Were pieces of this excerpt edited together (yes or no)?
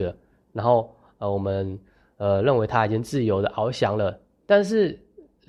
no